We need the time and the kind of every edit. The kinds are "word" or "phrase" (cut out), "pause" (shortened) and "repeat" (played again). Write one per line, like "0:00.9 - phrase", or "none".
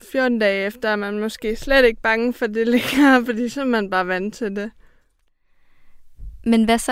none